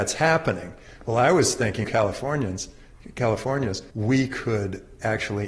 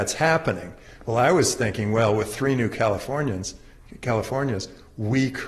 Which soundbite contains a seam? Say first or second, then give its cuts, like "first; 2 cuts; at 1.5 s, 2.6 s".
first; 2 cuts; at 1.8 s, 3.9 s